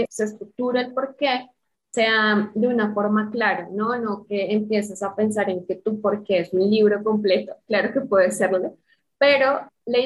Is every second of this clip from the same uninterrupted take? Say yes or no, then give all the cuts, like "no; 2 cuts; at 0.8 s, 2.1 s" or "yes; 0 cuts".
yes; 0 cuts